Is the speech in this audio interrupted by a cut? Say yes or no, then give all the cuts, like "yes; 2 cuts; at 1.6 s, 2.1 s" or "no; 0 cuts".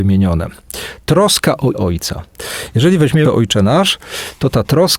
yes; 2 cuts; at 1.7 s, 3.2 s